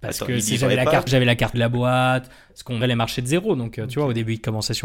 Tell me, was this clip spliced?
yes; 3 cuts; at 1.1 s, 1.5 s, 2.8 s

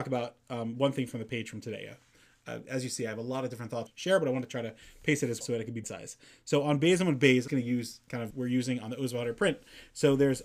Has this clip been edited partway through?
yes; 5 cuts; at 3.9 s, 5.4 s, 5.8 s, 7.5 s, 8.3 s

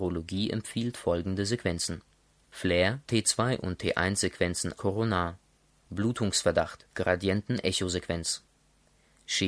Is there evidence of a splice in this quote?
yes; 3 cuts; at 3.0 s, 4.8 s, 6.9 s

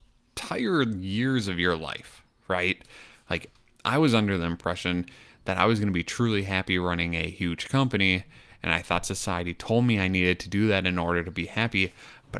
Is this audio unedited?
yes; 0 cuts

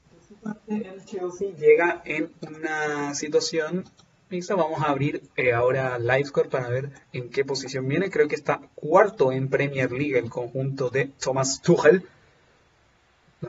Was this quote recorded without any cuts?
no; 2 cuts; at 5.3 s, 7.0 s

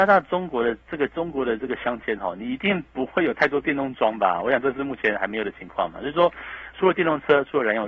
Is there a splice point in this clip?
yes; 1 cut; at 6.7 s

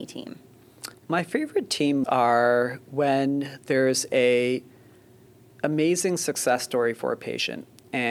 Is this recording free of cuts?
no; 2 cuts; at 0.9 s, 2.0 s

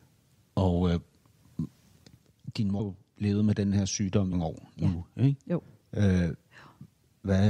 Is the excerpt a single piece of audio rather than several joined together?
no; 2 cuts; at 2.8 s, 4.3 s

